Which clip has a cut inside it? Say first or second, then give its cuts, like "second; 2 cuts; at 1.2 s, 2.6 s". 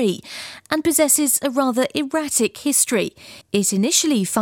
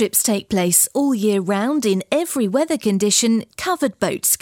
first; 1 cut; at 3.4 s